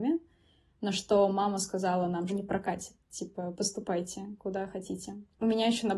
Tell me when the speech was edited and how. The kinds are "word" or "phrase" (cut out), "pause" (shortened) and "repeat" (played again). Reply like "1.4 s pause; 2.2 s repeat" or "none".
2.3 s phrase